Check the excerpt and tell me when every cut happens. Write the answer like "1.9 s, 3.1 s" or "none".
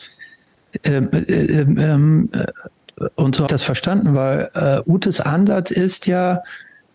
3.5 s

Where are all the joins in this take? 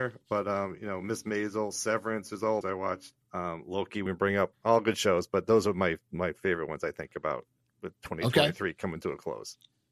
2.6 s, 3.2 s, 4.1 s

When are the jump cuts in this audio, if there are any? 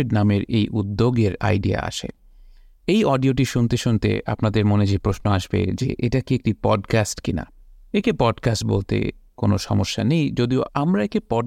none

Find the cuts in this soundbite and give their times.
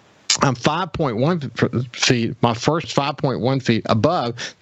2.8 s

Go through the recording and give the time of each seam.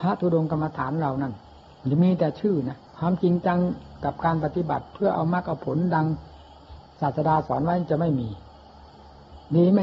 2.9 s

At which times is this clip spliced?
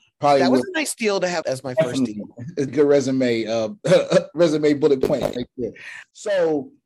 1.4 s, 2.7 s

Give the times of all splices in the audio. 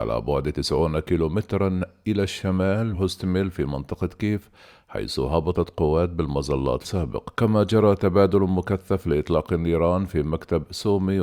2.9 s, 6.8 s, 7.3 s

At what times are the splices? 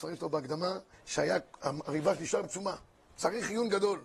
0.9 s, 2.4 s

